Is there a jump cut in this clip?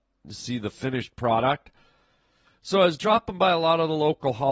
no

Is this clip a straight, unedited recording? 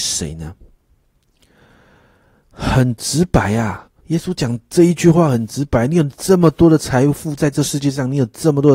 no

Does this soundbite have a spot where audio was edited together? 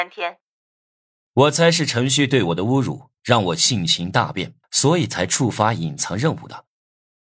yes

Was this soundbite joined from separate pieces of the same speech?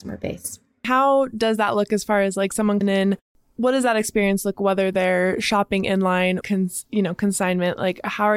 yes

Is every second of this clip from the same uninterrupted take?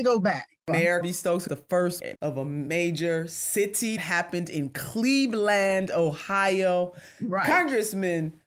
no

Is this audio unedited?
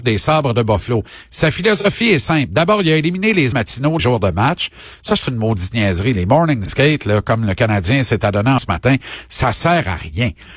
no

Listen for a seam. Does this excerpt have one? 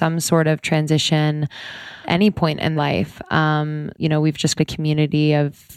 yes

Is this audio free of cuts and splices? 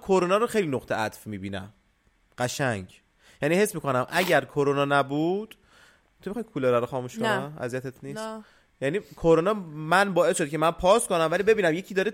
yes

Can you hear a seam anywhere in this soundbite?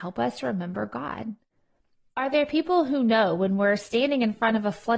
no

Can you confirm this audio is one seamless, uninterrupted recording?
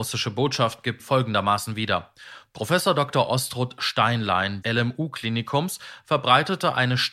no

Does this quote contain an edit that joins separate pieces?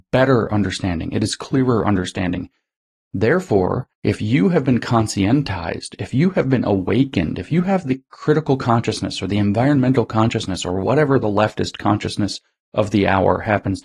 yes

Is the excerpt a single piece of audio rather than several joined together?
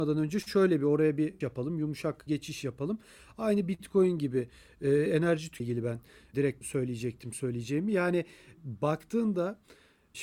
no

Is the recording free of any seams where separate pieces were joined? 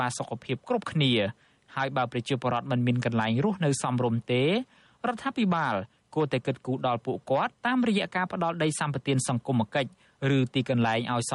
no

